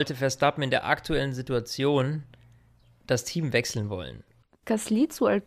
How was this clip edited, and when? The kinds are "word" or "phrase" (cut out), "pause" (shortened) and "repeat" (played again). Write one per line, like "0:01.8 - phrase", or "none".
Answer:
none